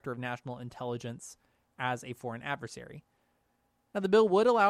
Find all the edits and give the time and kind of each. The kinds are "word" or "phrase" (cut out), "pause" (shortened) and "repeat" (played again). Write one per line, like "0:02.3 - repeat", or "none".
none